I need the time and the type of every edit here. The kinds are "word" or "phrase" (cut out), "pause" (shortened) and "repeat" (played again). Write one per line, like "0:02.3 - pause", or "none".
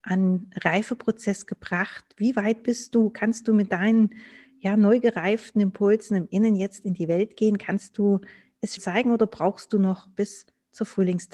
0:08.8 - word